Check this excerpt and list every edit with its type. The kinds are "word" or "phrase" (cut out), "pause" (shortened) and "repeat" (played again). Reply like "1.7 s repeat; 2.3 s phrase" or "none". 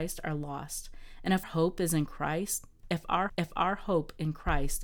1.4 s word; 3.3 s repeat